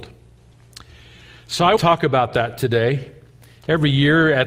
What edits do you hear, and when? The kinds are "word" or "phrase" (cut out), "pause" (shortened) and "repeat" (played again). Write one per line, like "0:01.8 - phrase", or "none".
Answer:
0:01.8 - word

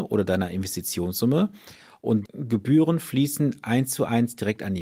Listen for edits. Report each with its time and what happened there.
0:02.2 - word
0:03.6 - word

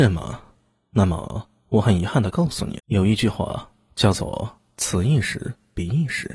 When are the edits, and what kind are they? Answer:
0:02.8 - word

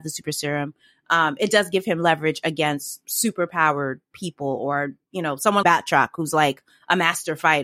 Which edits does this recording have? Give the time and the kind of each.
0:05.6 - word

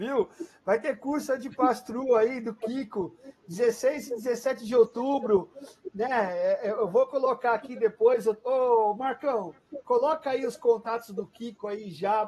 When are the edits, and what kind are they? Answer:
none

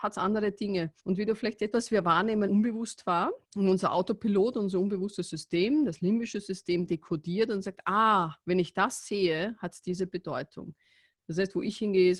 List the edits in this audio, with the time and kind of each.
0:01.0 - pause
0:01.7 - phrase
0:02.5 - word
0:03.4 - pause
0:08.4 - pause

